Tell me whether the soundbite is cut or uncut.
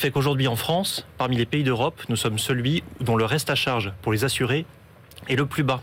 uncut